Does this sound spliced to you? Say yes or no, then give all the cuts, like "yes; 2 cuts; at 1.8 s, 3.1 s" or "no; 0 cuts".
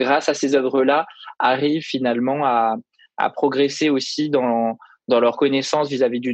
no; 0 cuts